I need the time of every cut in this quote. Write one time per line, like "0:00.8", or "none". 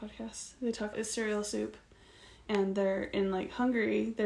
0:00.9